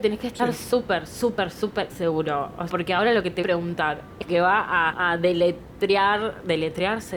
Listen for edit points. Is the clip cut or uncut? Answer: cut